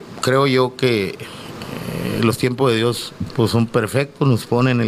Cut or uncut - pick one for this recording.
uncut